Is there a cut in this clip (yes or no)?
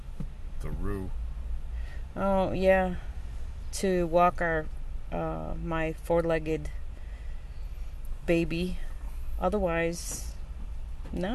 no